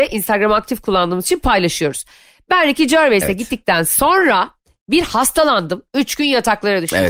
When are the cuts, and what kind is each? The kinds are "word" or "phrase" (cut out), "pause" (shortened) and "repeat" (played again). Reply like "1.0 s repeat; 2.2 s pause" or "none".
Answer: none